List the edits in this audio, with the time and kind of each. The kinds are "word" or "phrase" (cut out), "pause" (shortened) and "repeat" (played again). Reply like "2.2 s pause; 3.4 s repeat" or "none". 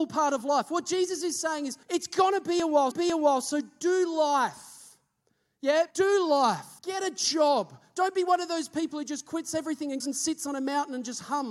1.8 s pause; 2.9 s repeat; 5.9 s pause; 6.8 s pause; 10.0 s word